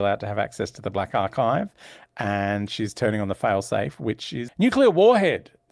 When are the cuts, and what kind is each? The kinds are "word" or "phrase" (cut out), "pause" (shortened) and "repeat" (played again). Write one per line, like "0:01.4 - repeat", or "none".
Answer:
0:04.5 - word